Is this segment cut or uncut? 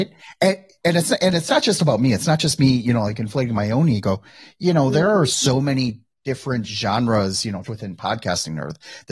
cut